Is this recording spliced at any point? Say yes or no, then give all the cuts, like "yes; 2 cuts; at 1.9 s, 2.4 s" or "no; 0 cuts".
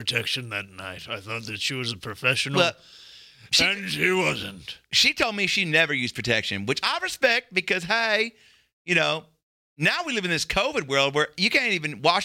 no; 0 cuts